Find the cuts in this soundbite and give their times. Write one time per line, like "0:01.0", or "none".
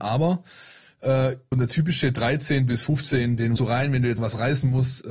0:01.5
0:03.6
0:04.2